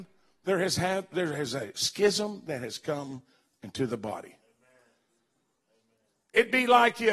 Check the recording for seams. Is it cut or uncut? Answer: uncut